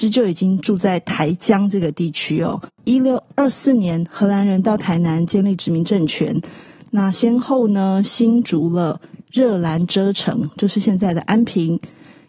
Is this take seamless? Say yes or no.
yes